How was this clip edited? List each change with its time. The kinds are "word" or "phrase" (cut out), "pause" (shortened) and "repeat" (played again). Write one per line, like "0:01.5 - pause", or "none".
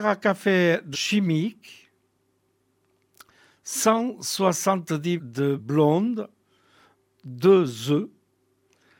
0:00.9 - word
0:05.2 - word
0:05.6 - word